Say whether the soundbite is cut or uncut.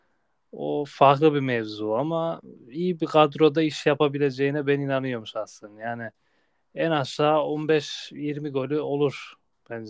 uncut